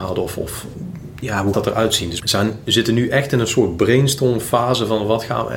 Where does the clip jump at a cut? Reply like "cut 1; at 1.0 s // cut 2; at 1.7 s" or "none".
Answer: cut 1; at 1.5 s // cut 2; at 2.2 s